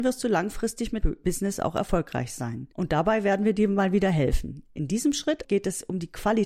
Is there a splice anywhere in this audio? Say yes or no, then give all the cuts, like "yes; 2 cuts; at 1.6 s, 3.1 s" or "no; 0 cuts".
yes; 2 cuts; at 1.0 s, 5.4 s